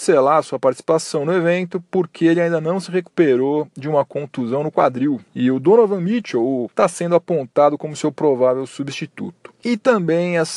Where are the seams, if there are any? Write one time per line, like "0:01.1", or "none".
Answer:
0:06.7